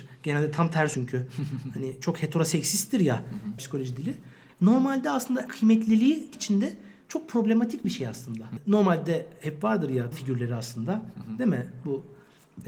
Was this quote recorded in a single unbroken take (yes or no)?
no